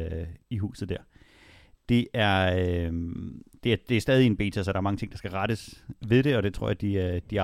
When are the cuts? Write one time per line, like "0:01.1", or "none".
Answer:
none